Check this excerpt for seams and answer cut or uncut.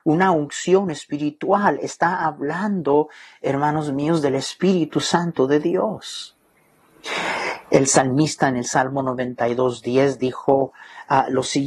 uncut